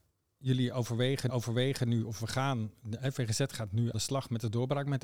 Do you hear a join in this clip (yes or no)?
yes